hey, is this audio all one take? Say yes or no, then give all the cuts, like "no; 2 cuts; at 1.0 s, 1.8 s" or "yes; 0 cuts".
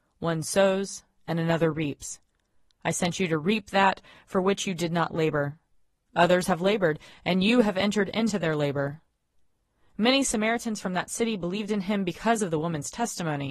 yes; 0 cuts